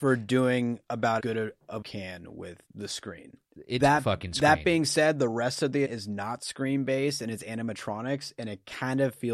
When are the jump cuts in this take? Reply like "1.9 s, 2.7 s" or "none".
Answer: 1.2 s, 1.8 s, 2.7 s, 3.8 s, 5.8 s